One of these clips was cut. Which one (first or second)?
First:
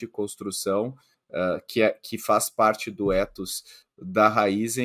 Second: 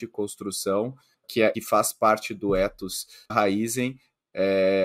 second